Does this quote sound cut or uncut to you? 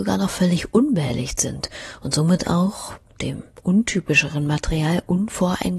uncut